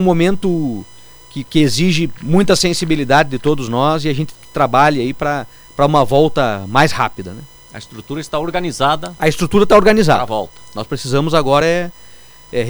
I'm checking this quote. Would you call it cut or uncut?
uncut